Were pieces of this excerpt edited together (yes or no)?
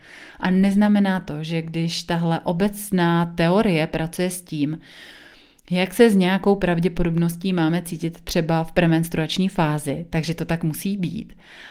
no